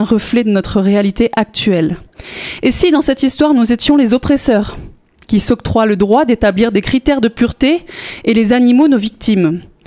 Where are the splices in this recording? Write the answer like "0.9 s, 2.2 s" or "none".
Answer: none